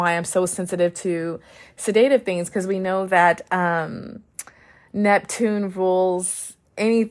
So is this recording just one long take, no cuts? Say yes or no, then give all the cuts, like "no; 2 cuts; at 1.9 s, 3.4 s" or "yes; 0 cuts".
yes; 0 cuts